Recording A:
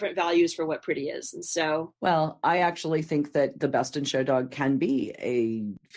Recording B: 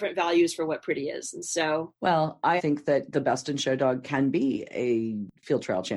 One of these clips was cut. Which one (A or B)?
B